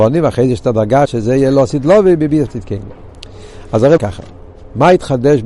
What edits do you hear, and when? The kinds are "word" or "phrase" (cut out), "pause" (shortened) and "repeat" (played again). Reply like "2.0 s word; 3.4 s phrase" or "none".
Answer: 1.0 s word; 2.5 s word; 4.0 s word